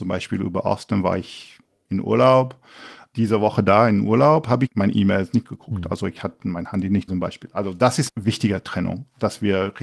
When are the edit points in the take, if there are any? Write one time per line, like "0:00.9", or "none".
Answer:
0:04.7
0:07.1
0:08.1